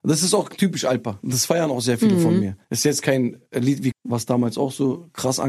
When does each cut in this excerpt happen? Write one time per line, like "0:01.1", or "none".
0:02.6
0:03.9